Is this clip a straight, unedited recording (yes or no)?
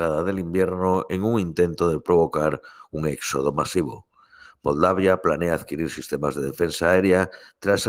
yes